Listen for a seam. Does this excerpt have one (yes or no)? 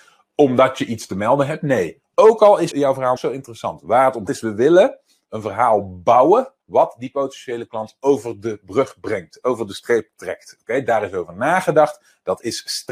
yes